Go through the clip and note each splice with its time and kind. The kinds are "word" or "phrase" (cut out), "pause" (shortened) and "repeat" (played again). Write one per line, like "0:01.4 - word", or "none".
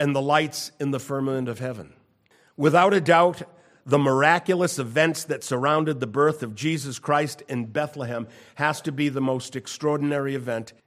none